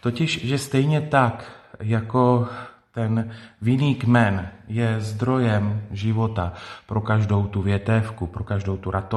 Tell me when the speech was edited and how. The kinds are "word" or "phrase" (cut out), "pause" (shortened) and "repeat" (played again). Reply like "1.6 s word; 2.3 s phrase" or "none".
none